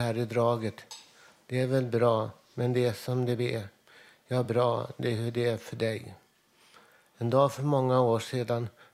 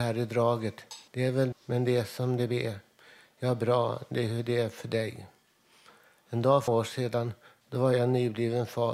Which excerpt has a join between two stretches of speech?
second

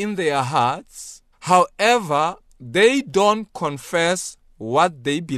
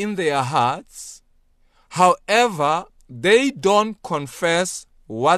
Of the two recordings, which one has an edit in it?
first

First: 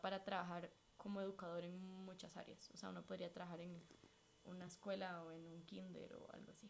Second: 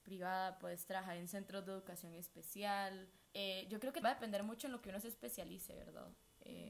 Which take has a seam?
second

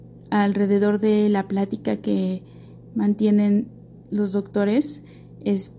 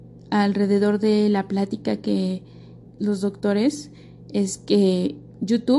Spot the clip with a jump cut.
second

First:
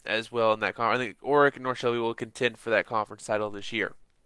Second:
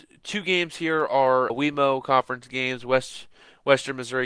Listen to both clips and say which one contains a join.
second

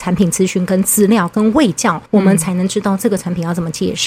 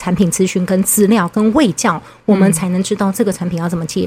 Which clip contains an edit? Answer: first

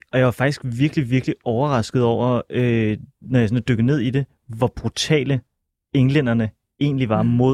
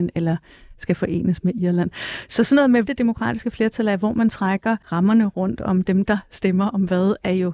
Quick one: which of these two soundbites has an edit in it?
second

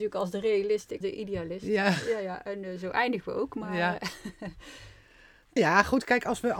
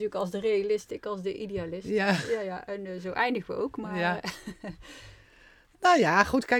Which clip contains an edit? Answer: first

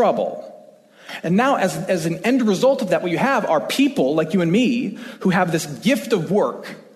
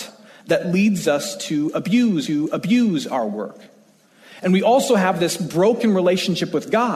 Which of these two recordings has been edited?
second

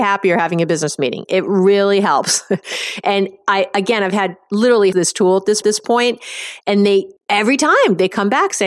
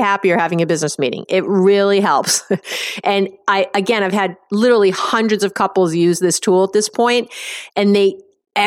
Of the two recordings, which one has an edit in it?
first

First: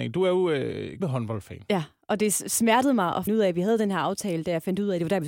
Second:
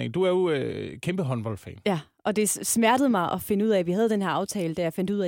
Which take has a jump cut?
first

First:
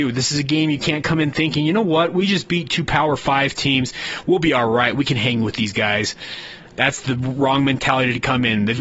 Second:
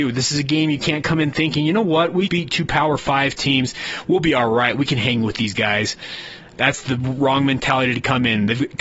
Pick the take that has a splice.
second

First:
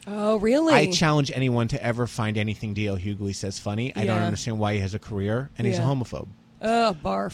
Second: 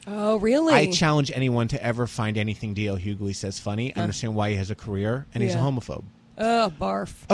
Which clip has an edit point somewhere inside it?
second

